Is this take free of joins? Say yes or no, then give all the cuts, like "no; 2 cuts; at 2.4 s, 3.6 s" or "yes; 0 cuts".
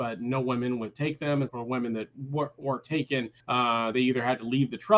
no; 2 cuts; at 1.5 s, 3.4 s